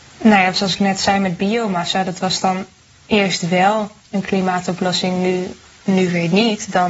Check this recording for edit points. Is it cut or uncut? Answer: cut